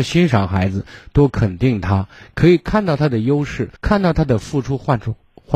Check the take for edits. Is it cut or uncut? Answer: cut